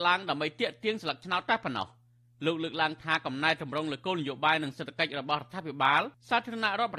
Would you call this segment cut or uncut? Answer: uncut